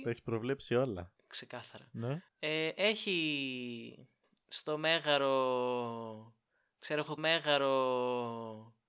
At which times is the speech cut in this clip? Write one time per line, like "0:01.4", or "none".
0:02.3
0:07.2